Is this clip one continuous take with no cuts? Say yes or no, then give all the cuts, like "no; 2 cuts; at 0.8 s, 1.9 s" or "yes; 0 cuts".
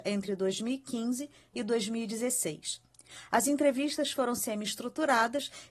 yes; 0 cuts